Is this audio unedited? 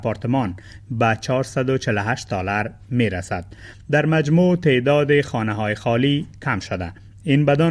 yes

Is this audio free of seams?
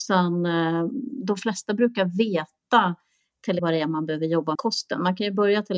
no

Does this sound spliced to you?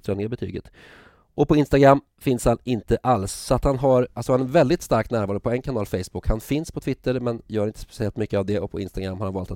no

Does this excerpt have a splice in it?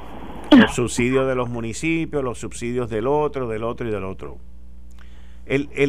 no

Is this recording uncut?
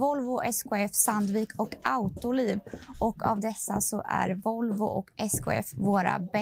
yes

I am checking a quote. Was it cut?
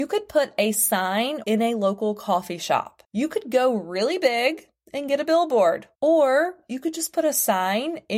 yes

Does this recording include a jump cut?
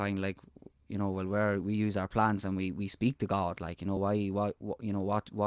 no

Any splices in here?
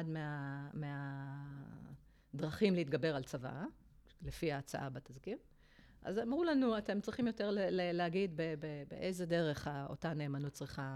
no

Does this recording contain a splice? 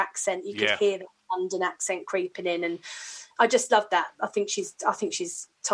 yes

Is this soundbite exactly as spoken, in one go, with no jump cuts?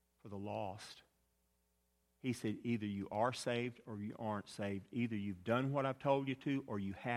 yes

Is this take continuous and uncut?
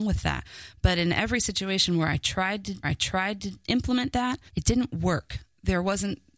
no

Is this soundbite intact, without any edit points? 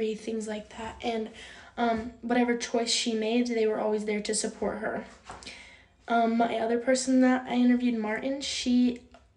yes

